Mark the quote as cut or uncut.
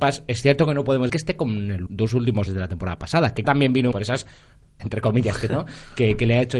cut